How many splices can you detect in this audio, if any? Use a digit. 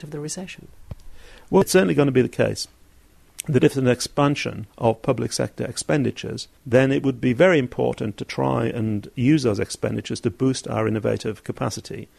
2